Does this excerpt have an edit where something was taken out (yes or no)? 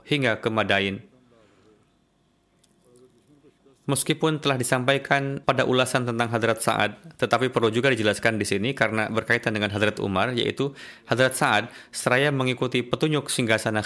yes